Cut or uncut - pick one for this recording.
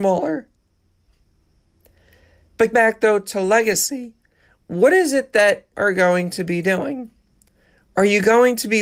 cut